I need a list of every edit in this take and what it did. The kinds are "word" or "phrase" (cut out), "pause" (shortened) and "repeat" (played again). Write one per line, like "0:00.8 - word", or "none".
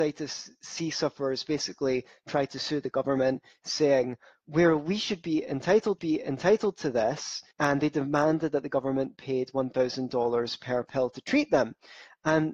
0:06.0 - repeat
0:07.5 - pause